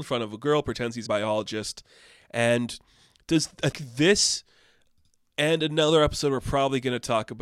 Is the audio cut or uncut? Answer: cut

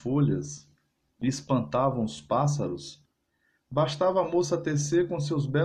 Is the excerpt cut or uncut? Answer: uncut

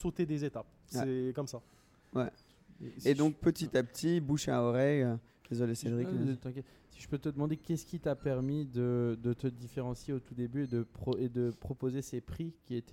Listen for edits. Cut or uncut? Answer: uncut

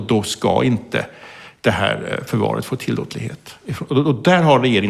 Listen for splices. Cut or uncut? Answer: uncut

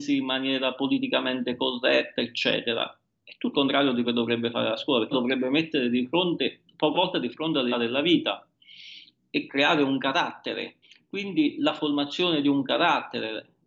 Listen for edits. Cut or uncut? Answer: cut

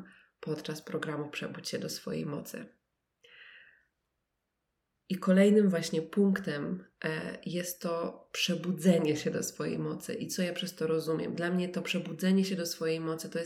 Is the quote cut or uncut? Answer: uncut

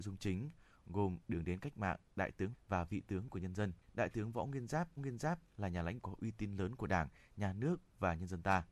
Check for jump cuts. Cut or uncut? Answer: cut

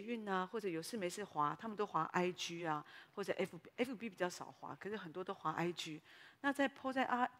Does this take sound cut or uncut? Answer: uncut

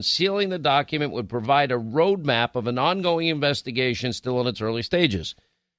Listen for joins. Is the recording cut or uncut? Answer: uncut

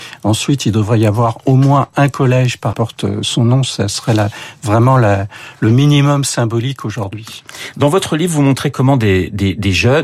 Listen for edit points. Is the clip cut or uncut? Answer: cut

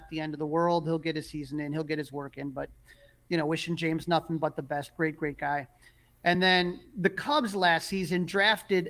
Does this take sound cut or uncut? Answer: uncut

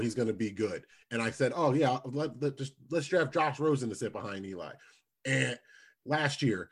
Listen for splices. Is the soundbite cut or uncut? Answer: uncut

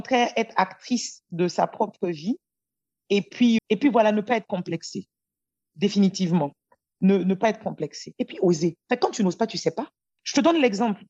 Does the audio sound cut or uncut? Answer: cut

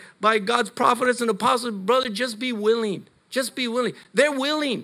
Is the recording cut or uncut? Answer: uncut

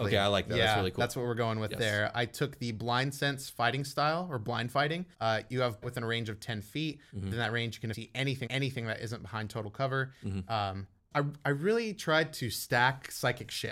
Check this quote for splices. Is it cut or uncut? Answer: cut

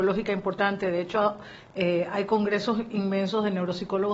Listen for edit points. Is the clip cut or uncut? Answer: uncut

